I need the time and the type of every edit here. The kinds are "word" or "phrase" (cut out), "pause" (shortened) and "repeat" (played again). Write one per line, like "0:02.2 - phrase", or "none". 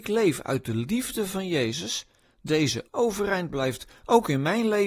0:02.9 - word